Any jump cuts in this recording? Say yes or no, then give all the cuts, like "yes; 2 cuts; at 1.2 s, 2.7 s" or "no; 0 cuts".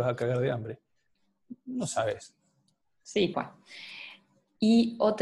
yes; 1 cut; at 3.3 s